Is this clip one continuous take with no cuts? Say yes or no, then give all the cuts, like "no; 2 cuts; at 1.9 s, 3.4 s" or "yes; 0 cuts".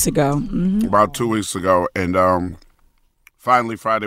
yes; 0 cuts